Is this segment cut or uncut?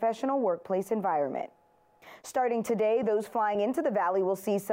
uncut